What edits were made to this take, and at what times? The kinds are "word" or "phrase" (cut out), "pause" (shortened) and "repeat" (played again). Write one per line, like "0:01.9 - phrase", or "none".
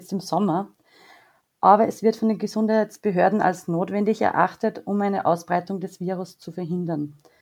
none